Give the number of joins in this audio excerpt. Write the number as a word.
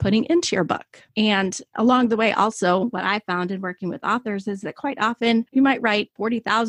one